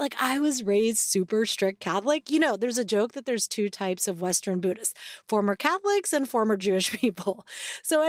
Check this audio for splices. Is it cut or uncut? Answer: uncut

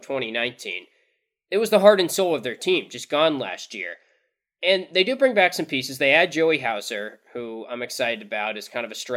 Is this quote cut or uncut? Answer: uncut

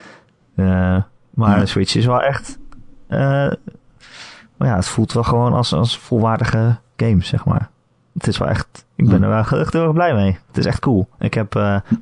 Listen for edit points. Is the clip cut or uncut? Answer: uncut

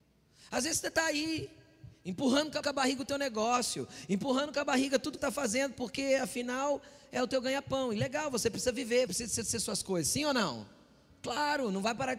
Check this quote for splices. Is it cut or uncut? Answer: cut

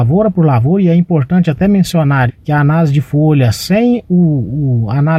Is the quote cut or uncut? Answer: cut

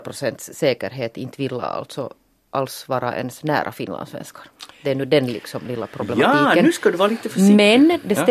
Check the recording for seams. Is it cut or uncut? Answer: uncut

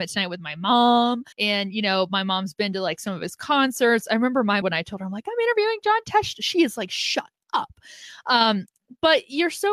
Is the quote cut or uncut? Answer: cut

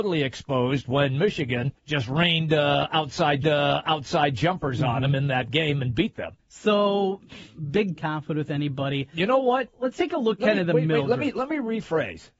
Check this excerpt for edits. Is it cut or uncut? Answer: cut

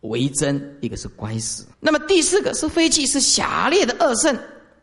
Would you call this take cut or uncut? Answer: cut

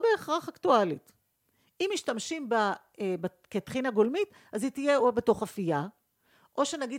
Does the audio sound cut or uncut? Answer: uncut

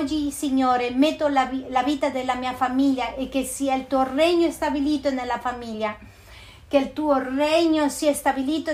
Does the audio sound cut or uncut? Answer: uncut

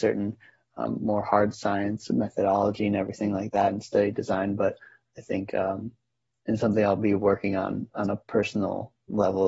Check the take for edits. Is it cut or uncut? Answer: uncut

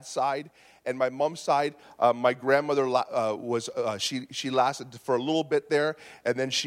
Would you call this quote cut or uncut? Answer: uncut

